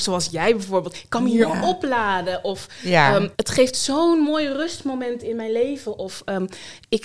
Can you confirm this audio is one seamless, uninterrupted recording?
no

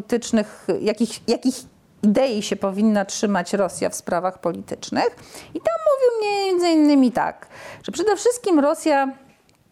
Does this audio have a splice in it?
no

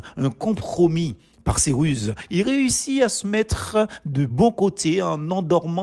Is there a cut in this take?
no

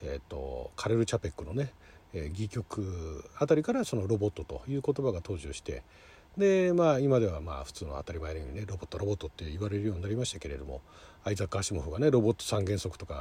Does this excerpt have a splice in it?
no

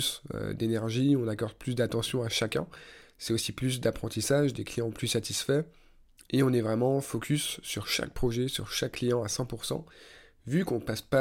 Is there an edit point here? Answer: no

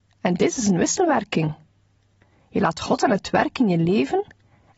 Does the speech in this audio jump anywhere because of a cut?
no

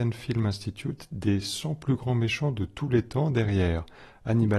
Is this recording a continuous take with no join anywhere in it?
yes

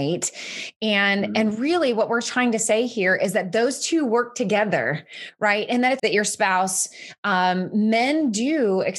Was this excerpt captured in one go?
no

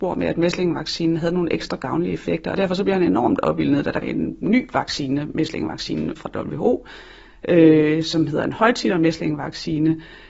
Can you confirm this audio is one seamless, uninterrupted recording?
no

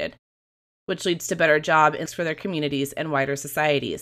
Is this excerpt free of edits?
no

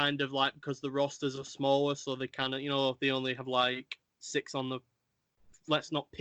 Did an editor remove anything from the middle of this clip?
no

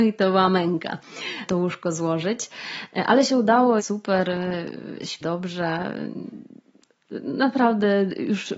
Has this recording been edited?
yes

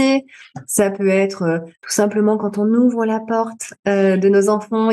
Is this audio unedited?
yes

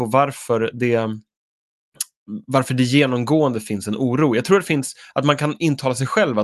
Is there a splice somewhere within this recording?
no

